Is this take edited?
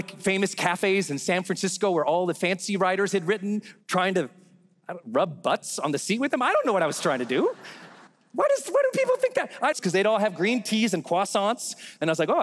yes; 3 cuts; at 3.8 s, 8.1 s, 9.7 s

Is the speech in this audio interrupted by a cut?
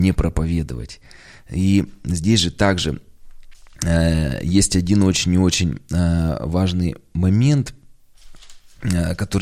no; 0 cuts

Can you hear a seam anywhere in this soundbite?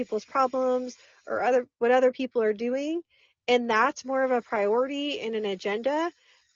no; 0 cuts

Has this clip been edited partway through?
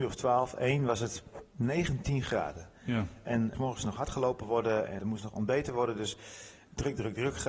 yes; 2 cuts; at 3.5 s, 5.0 s

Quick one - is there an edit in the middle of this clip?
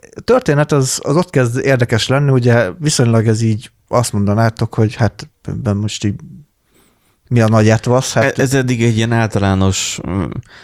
no; 0 cuts

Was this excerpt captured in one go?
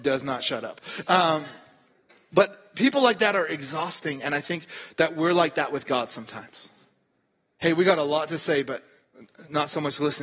yes; 0 cuts

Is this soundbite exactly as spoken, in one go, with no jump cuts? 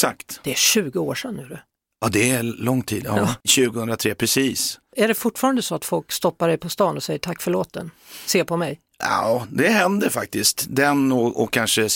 yes; 0 cuts

